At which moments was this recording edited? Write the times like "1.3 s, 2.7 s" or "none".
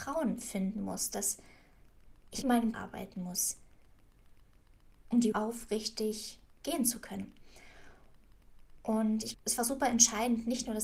2.4 s, 2.7 s, 5.3 s, 9.3 s